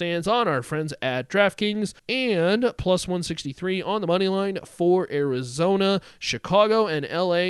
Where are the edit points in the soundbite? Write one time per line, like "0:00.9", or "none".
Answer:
0:02.0